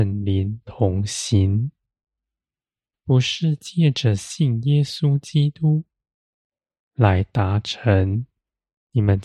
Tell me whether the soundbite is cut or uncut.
uncut